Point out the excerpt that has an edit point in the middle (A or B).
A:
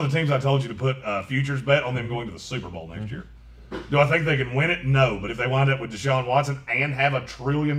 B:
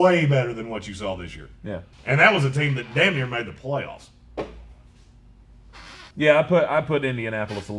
B